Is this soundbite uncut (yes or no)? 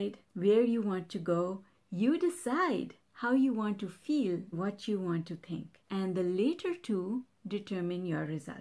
no